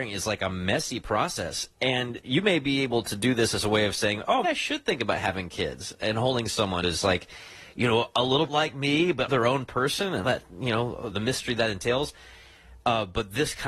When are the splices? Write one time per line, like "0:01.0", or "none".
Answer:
0:04.4
0:06.8
0:08.5
0:09.3
0:10.2
0:11.1